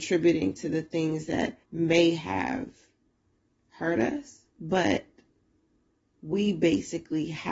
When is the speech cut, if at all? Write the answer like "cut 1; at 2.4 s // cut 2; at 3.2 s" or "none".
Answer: cut 1; at 1.6 s // cut 2; at 3.1 s // cut 3; at 4.5 s